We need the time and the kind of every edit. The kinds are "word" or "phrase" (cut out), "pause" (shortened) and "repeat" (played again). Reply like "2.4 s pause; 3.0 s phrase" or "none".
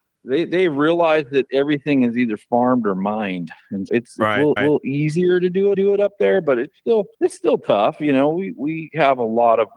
3.9 s word; 4.6 s repeat; 5.7 s repeat; 7.1 s pause